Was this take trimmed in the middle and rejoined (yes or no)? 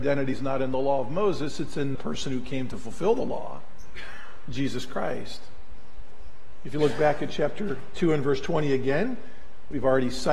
yes